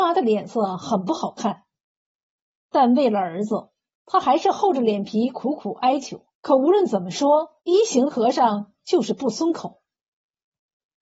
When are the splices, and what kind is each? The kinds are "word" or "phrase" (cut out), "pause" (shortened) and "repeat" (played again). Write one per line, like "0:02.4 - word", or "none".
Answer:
0:06.3 - pause
0:07.6 - pause